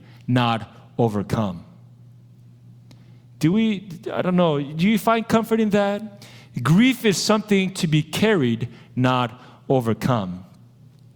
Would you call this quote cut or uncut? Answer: uncut